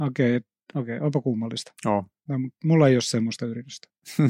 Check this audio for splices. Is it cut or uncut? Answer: uncut